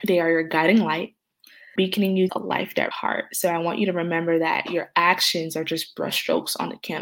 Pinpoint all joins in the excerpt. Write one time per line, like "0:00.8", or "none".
0:01.8
0:02.3
0:02.9